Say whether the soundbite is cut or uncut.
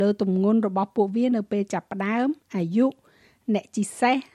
uncut